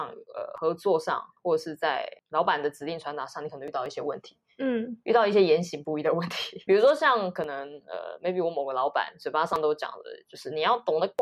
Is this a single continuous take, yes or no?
no